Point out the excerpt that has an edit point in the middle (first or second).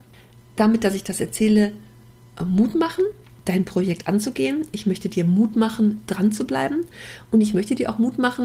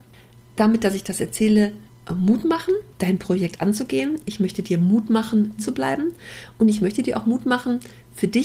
second